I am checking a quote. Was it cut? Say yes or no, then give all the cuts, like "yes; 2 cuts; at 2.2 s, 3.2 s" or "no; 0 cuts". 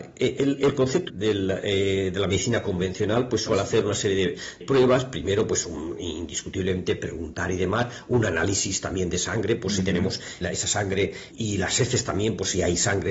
yes; 4 cuts; at 1.1 s, 4.6 s, 10.4 s, 11.3 s